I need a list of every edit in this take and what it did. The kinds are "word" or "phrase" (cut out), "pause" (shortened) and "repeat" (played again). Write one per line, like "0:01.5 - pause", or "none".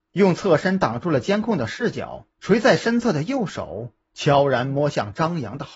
0:02.3 - pause